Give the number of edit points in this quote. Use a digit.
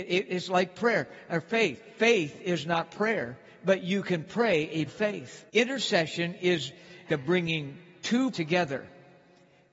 4